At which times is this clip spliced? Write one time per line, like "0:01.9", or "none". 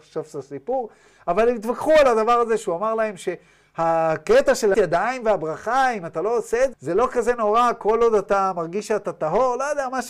0:04.7
0:06.7